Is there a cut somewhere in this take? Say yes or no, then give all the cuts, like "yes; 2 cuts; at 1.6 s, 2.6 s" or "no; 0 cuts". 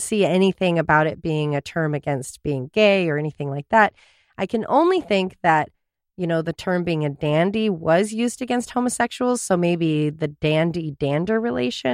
no; 0 cuts